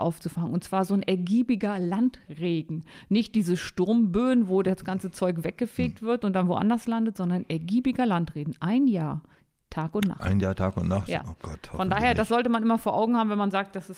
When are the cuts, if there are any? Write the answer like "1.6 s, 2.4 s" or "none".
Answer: none